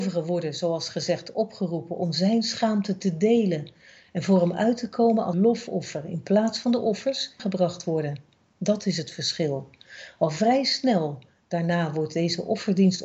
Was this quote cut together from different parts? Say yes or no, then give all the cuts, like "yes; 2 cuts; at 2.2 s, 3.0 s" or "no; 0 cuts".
yes; 2 cuts; at 5.3 s, 7.4 s